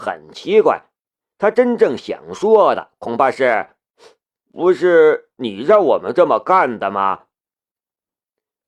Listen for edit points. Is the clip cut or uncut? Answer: uncut